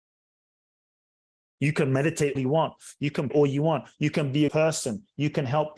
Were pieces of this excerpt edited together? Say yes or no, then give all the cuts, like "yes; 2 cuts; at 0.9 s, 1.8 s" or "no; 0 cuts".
yes; 3 cuts; at 2.4 s, 3.3 s, 4.5 s